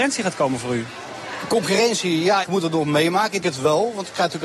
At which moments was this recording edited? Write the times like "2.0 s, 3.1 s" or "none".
2.4 s, 3.4 s